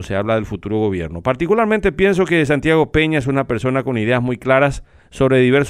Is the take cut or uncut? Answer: uncut